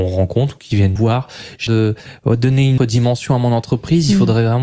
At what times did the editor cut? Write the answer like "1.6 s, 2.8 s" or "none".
1.0 s, 1.7 s, 2.8 s